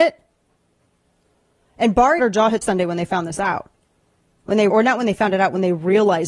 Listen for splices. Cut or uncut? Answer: cut